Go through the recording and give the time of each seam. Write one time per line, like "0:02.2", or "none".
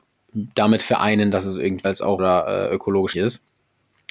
0:01.8
0:02.2
0:03.1